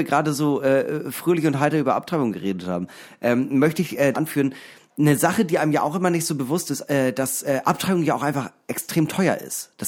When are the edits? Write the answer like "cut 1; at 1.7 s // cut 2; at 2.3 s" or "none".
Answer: cut 1; at 4.1 s